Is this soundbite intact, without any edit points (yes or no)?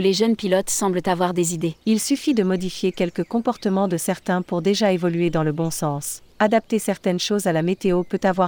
no